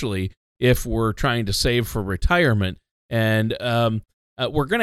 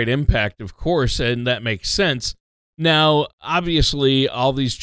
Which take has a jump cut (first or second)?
second